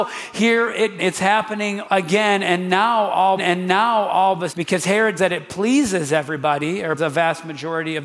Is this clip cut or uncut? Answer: cut